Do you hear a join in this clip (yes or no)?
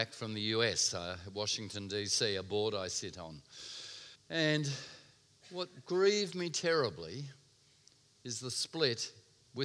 yes